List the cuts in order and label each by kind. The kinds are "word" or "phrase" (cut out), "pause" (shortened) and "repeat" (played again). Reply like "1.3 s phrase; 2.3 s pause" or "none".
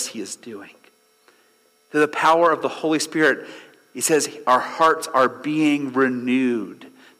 none